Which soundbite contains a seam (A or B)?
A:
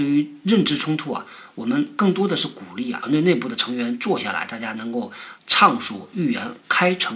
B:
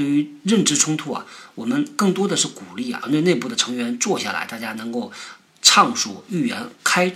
A